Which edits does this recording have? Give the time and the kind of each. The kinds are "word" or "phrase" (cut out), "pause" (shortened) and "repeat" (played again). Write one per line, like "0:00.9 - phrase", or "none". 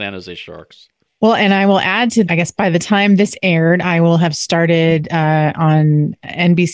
0:01.1 - pause
0:02.3 - phrase

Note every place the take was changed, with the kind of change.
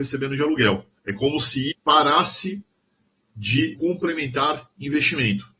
0:01.0 - pause
0:01.7 - word
0:03.7 - word

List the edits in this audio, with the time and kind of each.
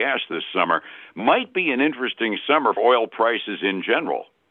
0:02.8 - word

